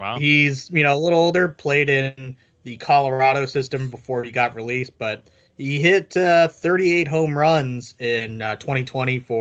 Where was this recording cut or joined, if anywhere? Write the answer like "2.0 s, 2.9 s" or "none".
none